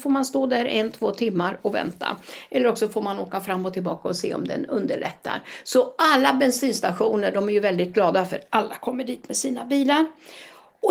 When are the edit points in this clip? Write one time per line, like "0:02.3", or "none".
none